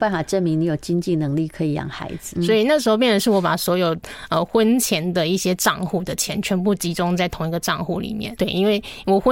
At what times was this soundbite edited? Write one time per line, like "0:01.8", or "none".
0:02.3
0:08.4